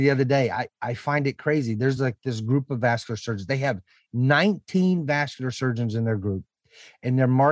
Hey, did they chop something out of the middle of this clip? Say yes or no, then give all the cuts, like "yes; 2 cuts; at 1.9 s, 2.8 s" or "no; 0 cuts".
no; 0 cuts